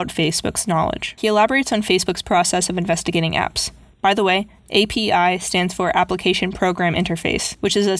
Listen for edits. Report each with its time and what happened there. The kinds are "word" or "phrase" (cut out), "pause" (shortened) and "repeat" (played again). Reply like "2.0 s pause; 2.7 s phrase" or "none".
none